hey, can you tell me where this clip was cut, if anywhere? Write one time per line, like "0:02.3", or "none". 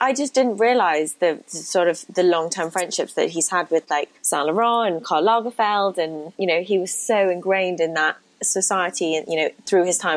0:04.2
0:06.3

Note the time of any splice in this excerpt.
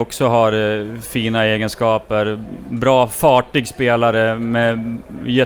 none

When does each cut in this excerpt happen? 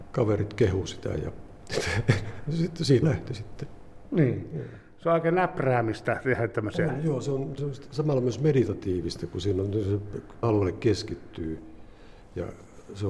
0:03.0
0:07.6
0:10.4

